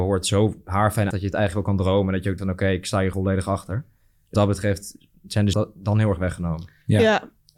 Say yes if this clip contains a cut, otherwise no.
yes